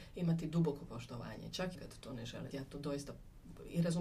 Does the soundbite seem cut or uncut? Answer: cut